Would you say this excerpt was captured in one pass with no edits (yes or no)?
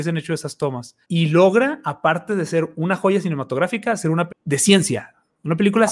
no